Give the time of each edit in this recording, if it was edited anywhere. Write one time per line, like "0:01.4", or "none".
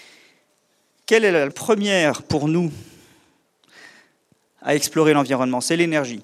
0:01.5